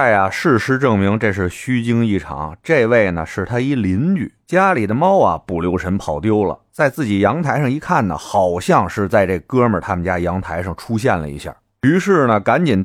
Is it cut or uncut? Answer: uncut